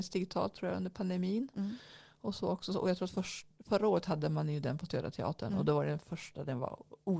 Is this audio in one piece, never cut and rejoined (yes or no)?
yes